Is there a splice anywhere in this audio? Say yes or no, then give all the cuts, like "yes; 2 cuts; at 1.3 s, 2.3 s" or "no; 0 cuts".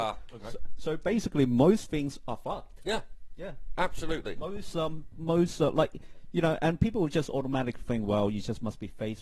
no; 0 cuts